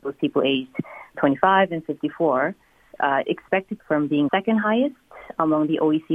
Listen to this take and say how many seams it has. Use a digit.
4